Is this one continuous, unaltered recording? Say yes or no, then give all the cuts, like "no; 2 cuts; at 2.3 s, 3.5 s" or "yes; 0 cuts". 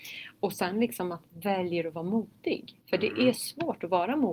no; 3 cuts; at 1.3 s, 2.8 s, 3.3 s